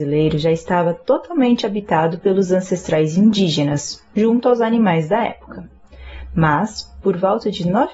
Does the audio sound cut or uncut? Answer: uncut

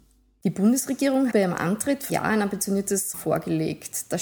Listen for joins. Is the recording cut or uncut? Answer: cut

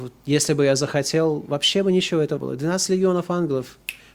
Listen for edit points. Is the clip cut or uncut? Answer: cut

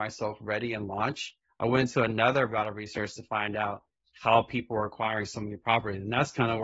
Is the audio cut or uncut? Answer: uncut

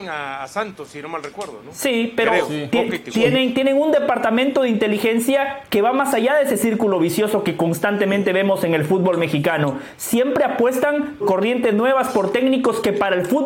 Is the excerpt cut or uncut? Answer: cut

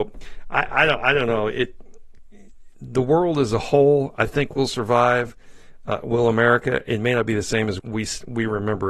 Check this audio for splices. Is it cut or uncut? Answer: cut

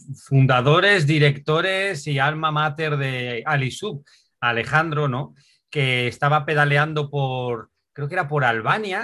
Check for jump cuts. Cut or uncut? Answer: uncut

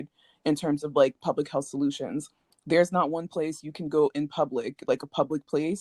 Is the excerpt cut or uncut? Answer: uncut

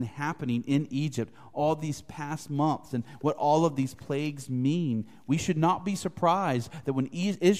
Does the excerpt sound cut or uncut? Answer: uncut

